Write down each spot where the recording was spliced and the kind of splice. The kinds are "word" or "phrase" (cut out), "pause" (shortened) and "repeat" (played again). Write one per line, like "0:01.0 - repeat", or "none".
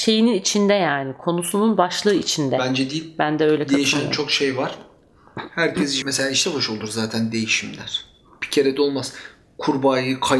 0:06.0 - phrase
0:06.4 - word